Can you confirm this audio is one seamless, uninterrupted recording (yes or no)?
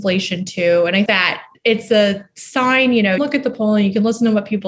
no